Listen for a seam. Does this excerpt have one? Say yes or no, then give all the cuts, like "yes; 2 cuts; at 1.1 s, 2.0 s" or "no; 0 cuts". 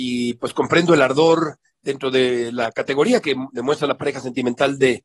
no; 0 cuts